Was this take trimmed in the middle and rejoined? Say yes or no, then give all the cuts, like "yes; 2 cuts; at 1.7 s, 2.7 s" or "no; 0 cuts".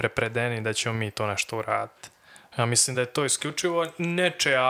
no; 0 cuts